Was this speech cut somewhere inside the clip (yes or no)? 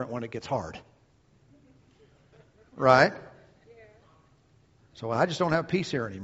no